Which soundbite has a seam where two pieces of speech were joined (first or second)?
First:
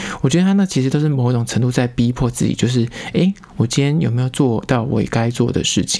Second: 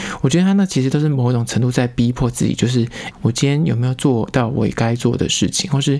second